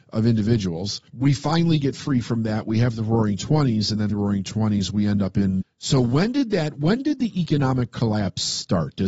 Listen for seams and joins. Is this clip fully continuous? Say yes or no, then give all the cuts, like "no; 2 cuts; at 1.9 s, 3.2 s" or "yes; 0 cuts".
no; 3 cuts; at 1.1 s, 4.1 s, 5.6 s